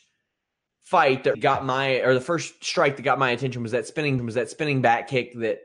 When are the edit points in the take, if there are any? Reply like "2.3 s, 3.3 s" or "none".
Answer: 1.3 s, 4.2 s